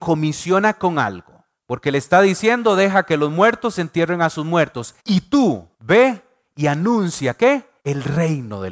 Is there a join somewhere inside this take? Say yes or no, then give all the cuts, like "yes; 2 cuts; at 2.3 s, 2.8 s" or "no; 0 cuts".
yes; 4 cuts; at 1.5 s, 5.0 s, 5.7 s, 7.8 s